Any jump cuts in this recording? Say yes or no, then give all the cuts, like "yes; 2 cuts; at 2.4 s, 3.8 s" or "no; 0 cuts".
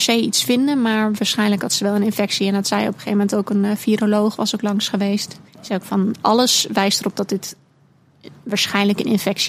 yes; 1 cut; at 5.5 s